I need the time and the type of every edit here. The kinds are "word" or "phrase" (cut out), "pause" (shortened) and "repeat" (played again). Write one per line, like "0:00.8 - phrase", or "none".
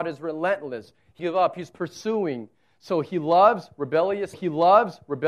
0:01.2 - word
0:04.3 - repeat

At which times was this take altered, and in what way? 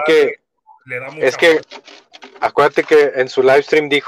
none

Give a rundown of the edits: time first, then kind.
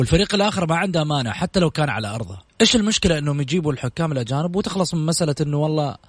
0:02.5 - pause

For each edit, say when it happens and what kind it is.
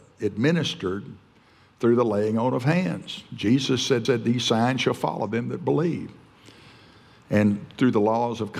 0:04.0 - repeat

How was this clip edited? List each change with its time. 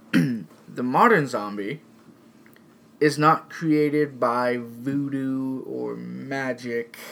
none

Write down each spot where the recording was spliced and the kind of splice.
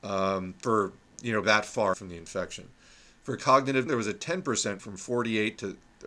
0:01.4 - word
0:01.9 - word
0:03.9 - word
0:04.8 - word

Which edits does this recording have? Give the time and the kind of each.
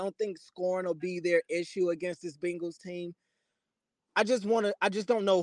none

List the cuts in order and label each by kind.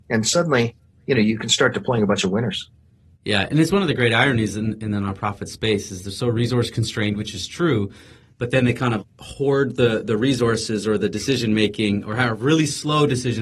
0:09.0 - word

